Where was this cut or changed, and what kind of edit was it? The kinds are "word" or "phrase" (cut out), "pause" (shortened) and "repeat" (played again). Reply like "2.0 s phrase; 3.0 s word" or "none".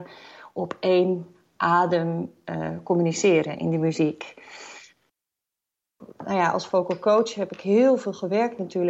none